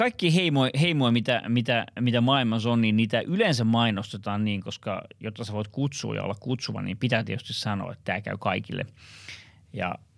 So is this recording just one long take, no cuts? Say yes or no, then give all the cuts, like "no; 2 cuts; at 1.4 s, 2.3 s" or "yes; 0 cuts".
yes; 0 cuts